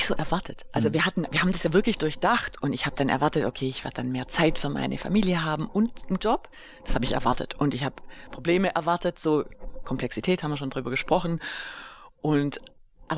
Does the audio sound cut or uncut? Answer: cut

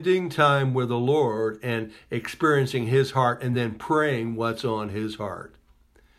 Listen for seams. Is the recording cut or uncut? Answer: uncut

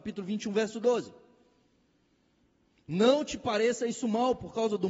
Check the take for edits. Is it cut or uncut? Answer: uncut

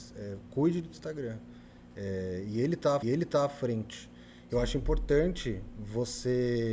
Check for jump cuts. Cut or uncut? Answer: cut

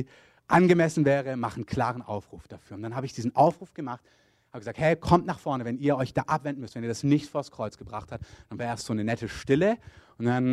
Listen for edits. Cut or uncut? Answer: uncut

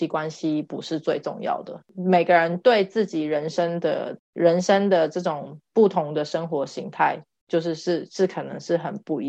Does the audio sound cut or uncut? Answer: uncut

